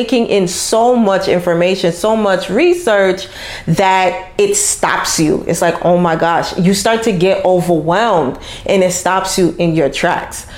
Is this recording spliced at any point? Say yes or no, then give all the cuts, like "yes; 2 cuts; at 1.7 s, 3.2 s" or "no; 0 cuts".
no; 0 cuts